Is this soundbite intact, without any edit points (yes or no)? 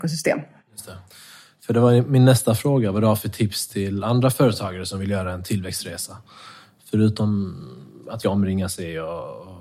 no